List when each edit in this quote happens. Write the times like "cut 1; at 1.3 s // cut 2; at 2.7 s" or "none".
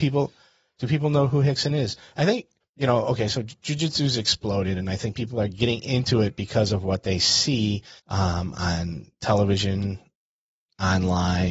cut 1; at 2.6 s // cut 2; at 8.0 s